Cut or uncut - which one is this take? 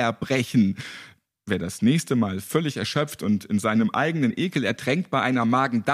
uncut